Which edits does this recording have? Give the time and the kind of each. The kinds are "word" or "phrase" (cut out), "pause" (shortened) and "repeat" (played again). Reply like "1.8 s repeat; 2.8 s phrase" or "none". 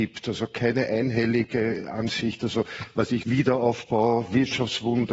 3.2 s phrase